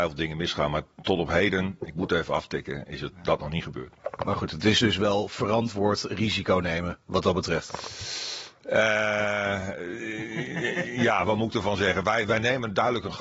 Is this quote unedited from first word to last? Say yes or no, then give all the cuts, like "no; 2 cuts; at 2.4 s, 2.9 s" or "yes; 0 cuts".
yes; 0 cuts